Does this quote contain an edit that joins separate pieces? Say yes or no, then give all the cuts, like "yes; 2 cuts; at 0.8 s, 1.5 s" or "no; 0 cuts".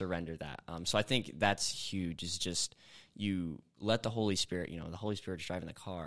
no; 0 cuts